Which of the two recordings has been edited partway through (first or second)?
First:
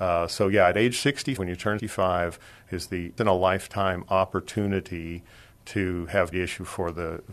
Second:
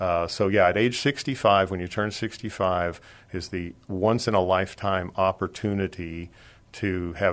first